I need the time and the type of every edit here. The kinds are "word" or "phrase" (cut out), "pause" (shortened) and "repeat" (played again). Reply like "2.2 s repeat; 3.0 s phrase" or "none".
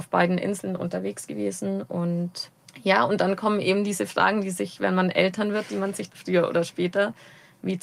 6.1 s phrase